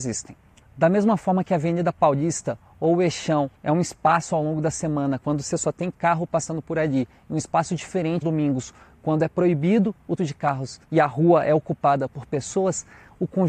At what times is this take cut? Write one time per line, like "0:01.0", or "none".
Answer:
0:03.6
0:08.2
0:10.2
0:10.8